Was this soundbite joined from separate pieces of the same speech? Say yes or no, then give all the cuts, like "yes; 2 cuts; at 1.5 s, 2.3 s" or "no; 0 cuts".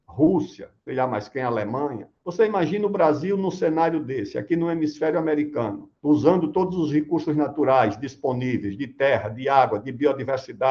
no; 0 cuts